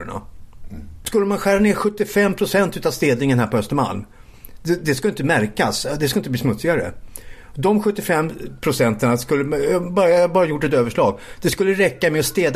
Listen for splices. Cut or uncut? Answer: uncut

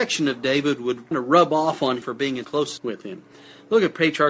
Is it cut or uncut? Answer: cut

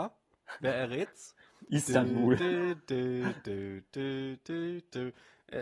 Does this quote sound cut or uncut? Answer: uncut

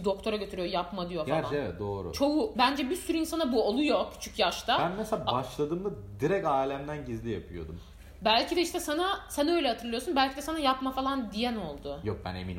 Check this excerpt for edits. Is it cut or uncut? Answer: uncut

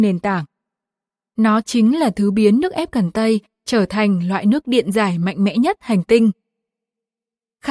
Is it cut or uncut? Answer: uncut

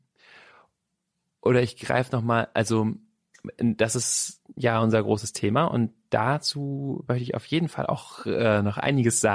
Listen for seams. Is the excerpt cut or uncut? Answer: uncut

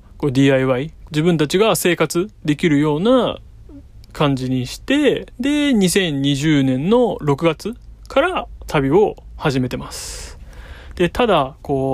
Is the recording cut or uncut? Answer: cut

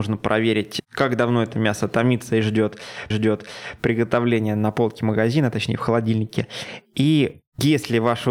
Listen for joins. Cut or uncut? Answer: cut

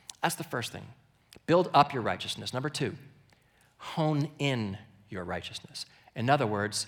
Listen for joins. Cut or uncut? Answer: uncut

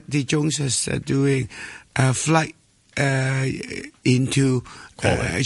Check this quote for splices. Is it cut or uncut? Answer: uncut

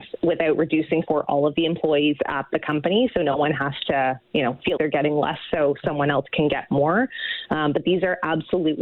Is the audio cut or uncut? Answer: cut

